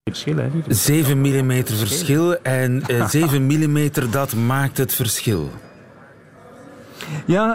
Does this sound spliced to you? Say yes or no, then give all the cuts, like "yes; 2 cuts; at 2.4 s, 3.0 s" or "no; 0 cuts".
no; 0 cuts